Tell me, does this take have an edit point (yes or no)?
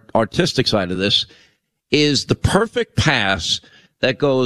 no